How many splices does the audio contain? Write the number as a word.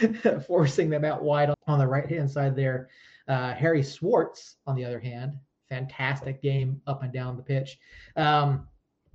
one